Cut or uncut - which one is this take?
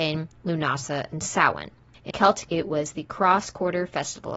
cut